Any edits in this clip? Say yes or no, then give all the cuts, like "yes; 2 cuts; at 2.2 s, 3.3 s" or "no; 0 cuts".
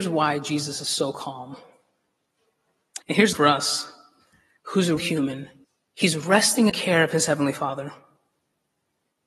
yes; 6 cuts; at 3.0 s, 3.3 s, 4.6 s, 5.0 s, 5.6 s, 6.7 s